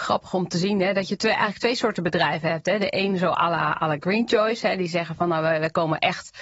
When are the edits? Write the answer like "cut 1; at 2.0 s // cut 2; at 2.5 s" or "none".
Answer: none

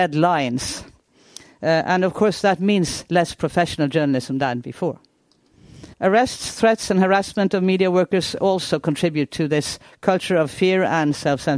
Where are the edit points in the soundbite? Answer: cut 1; at 5.9 s

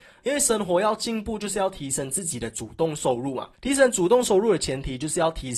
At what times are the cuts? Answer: cut 1; at 3.5 s

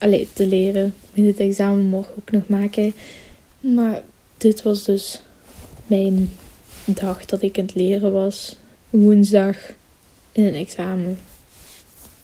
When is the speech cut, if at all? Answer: none

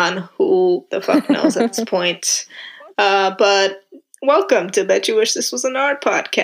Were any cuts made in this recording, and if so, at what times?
none

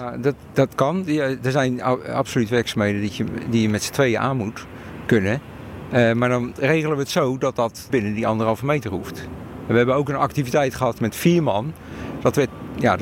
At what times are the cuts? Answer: cut 1; at 7.9 s // cut 2; at 11.0 s

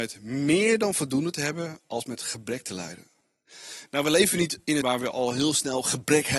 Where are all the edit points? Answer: cut 1; at 4.8 s

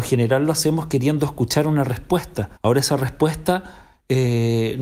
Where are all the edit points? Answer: cut 1; at 2.6 s

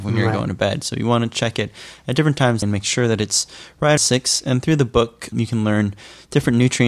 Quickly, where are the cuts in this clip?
cut 1; at 2.6 s // cut 2; at 4.0 s // cut 3; at 5.3 s

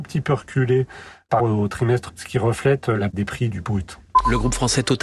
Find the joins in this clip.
cut 1; at 1.4 s // cut 2; at 2.1 s // cut 3; at 3.1 s // cut 4; at 3.5 s

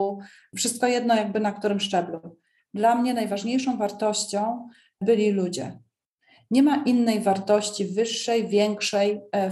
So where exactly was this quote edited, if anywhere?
none

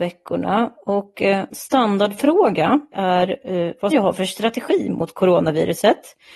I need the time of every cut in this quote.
cut 1; at 1.5 s // cut 2; at 2.9 s // cut 3; at 3.9 s

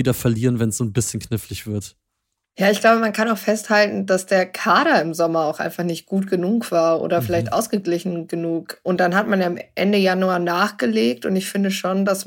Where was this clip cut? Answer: none

